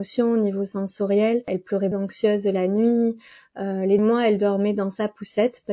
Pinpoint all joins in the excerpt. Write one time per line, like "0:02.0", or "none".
0:01.9
0:04.0